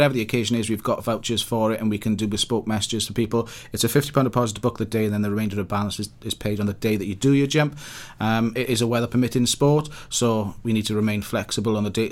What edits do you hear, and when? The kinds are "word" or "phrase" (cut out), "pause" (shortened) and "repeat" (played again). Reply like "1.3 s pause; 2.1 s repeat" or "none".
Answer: none